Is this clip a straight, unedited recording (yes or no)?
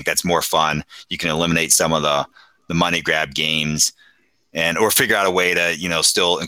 yes